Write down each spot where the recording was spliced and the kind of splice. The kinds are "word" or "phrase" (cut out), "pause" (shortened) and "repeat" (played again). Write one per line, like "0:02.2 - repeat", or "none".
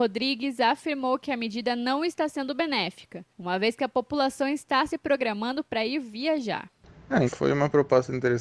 0:03.3 - pause
0:07.3 - word